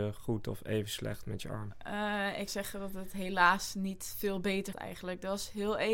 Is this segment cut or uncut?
cut